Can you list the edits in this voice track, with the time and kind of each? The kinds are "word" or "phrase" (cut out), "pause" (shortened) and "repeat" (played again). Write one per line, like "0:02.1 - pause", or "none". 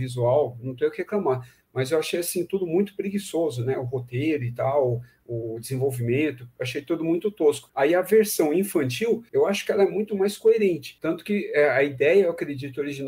none